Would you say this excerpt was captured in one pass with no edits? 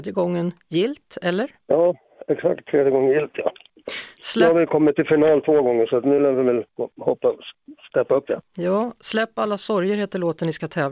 no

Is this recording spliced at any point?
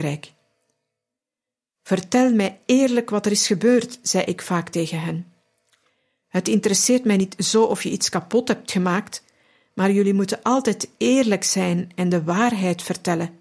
no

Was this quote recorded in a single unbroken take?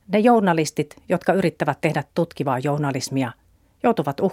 yes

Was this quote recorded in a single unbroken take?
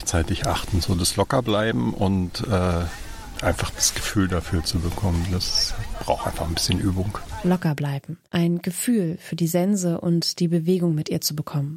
no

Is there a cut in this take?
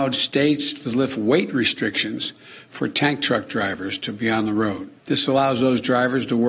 yes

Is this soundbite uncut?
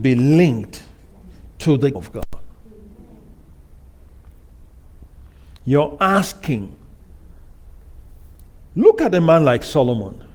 no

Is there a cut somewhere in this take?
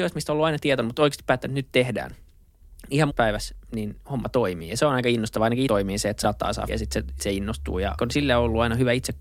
yes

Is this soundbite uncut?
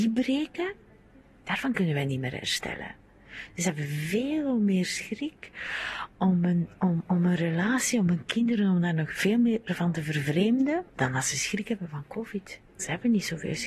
no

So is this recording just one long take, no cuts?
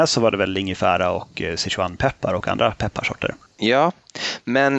yes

